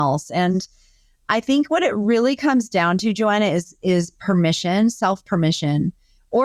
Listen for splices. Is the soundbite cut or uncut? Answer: uncut